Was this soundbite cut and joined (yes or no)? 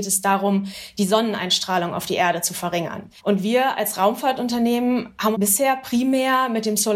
yes